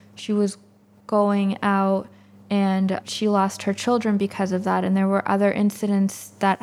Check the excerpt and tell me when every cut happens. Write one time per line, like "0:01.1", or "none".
none